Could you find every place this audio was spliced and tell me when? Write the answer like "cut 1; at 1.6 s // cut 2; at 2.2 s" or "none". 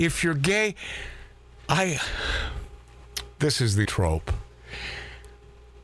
cut 1; at 1.5 s // cut 2; at 3.8 s